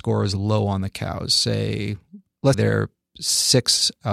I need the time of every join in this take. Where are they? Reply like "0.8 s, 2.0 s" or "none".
2.5 s